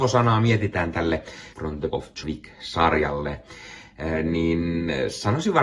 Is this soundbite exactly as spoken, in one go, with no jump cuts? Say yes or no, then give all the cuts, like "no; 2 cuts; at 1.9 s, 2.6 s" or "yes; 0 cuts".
no; 3 cuts; at 1.5 s, 1.9 s, 2.2 s